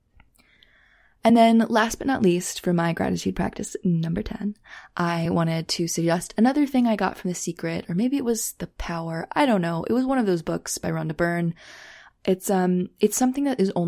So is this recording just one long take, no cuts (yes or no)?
yes